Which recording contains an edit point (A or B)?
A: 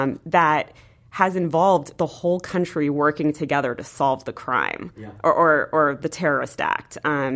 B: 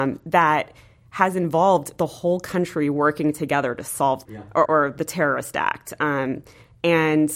B